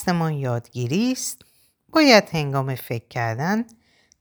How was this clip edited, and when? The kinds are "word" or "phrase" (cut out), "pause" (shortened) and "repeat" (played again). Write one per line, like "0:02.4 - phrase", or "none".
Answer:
none

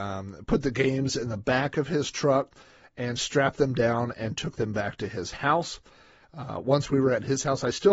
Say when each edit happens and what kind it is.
none

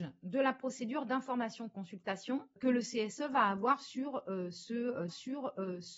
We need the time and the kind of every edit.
0:05.1 - repeat

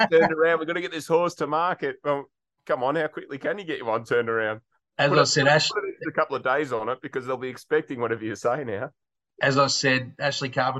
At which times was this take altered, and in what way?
none

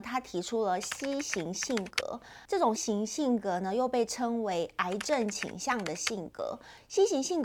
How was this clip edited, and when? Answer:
0:02.5 - pause
0:02.8 - word

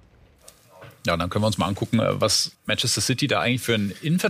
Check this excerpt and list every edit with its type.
0:02.5 - pause

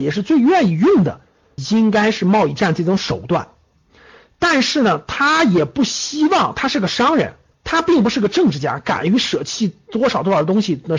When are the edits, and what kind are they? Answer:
0:01.6 - word
0:07.5 - pause

